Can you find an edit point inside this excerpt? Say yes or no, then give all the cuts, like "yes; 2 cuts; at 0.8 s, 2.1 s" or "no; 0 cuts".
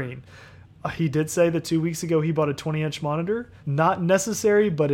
yes; 1 cut; at 3.6 s